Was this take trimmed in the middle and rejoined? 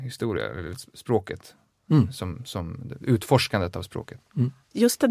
no; 0 cuts

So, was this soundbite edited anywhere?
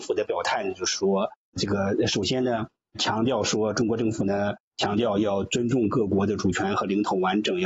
no; 0 cuts

